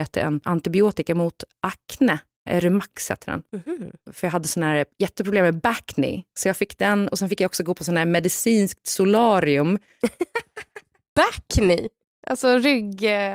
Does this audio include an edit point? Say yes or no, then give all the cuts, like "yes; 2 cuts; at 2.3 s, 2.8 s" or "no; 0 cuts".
no; 0 cuts